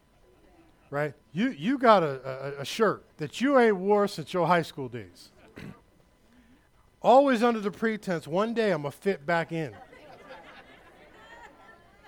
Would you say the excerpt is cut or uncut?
cut